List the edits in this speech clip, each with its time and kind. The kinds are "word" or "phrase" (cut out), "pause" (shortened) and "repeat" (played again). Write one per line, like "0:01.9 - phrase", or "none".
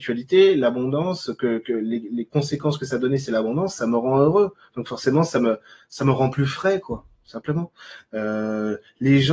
none